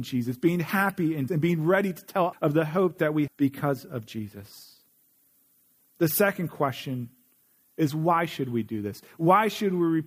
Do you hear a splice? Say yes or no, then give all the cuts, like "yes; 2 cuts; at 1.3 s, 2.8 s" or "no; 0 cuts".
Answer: yes; 3 cuts; at 1.3 s, 2.3 s, 3.3 s